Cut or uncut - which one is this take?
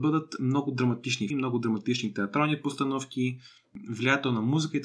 cut